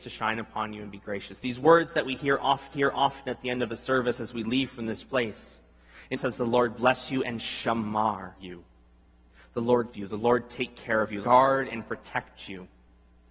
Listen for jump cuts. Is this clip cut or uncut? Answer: cut